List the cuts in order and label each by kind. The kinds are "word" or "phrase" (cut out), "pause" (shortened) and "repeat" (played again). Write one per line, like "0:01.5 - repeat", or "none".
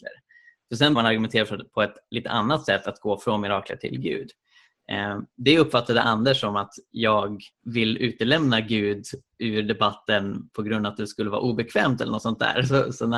0:01.0 - word
0:07.5 - pause